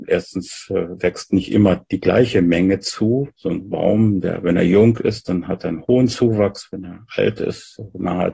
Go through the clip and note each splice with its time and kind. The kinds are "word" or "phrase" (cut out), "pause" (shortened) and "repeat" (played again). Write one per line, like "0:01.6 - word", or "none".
0:03.3 - pause